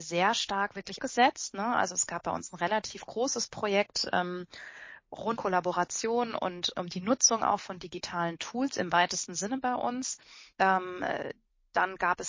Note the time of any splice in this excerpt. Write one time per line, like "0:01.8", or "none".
0:01.0
0:05.4
0:06.7
0:10.5